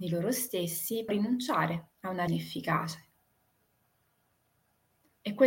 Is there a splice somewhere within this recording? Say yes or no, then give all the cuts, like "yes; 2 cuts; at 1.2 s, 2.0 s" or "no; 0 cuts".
yes; 3 cuts; at 1.1 s, 1.9 s, 2.3 s